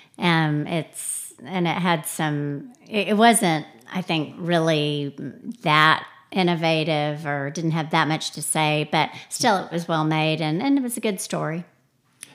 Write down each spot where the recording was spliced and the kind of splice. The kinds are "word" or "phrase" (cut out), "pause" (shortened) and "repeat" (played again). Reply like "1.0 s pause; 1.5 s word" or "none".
9.7 s phrase